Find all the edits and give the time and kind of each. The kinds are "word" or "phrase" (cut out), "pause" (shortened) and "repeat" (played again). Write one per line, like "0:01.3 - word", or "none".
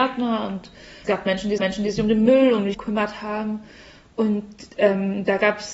0:01.0 - word
0:01.6 - repeat
0:02.7 - word
0:04.7 - pause